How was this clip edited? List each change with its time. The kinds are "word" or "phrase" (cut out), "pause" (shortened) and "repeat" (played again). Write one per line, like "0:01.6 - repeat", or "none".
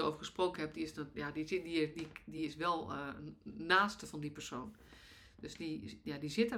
none